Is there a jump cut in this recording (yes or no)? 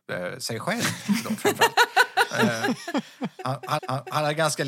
yes